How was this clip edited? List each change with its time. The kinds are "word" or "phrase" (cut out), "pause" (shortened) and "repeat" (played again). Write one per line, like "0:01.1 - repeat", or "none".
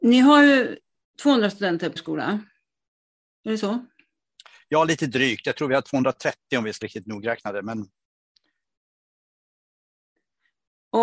0:02.0 - word
0:06.8 - word